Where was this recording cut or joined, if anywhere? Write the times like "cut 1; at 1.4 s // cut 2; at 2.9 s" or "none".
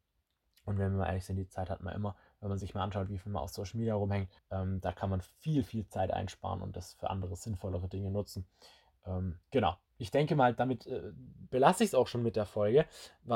cut 1; at 4.4 s // cut 2; at 9.4 s